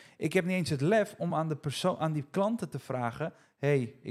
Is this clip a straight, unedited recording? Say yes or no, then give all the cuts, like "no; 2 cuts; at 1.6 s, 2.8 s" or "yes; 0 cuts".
yes; 0 cuts